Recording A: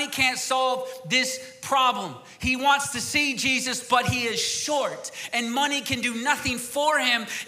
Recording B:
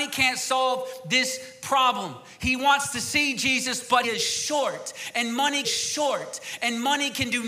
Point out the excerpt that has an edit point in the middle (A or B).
B